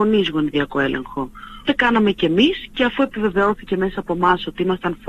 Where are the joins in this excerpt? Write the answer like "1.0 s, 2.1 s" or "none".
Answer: 1.6 s

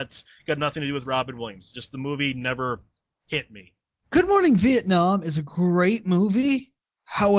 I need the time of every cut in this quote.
none

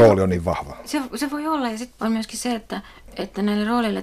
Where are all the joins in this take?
2.0 s

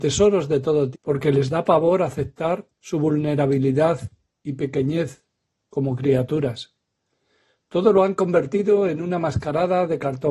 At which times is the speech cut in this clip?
0.9 s, 2.7 s

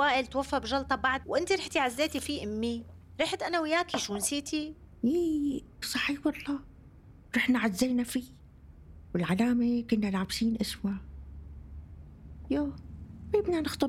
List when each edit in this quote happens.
1.2 s, 5.8 s

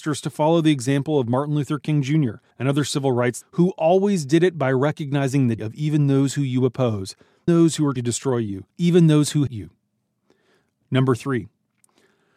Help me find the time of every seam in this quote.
2.5 s, 3.4 s, 5.6 s, 7.5 s, 8.0 s, 8.7 s, 9.5 s

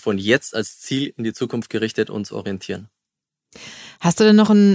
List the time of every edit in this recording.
none

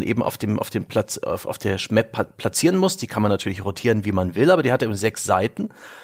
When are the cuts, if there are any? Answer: none

